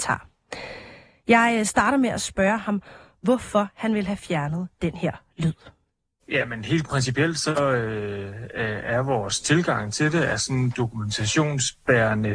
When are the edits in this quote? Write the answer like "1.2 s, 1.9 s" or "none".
none